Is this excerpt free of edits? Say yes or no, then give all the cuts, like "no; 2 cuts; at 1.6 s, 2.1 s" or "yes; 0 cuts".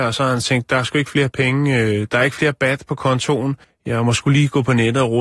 no; 1 cut; at 3.6 s